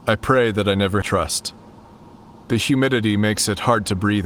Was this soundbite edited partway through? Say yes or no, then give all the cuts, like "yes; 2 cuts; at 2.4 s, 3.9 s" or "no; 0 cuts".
yes; 1 cut; at 1.0 s